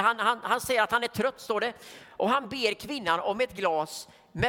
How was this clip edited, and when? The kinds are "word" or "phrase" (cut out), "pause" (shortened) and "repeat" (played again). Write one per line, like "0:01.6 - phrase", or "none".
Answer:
none